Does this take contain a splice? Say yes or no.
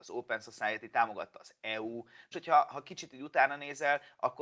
yes